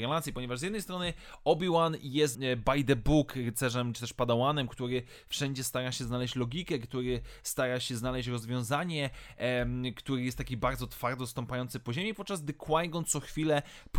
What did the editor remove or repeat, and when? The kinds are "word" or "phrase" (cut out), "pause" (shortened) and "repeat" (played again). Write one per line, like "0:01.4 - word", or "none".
0:02.3 - word
0:03.9 - word